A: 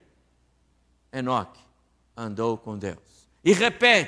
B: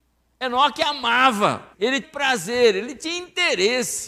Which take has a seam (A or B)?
B